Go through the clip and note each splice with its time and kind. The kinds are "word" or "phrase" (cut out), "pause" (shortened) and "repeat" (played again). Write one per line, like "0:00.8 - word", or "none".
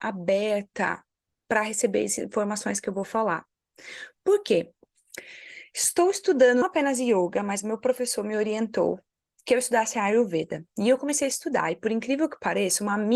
0:06.6 - word